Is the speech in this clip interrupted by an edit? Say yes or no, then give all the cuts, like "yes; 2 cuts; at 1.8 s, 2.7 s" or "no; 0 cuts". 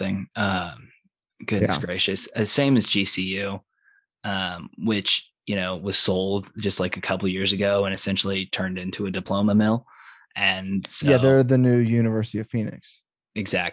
no; 0 cuts